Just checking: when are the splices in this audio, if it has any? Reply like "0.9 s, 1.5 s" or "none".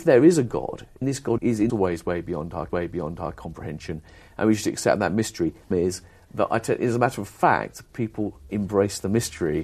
1.0 s, 1.4 s, 1.7 s, 2.7 s, 5.7 s, 8.5 s